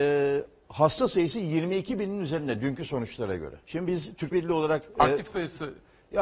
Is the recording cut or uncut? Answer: cut